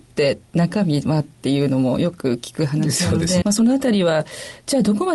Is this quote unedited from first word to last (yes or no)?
no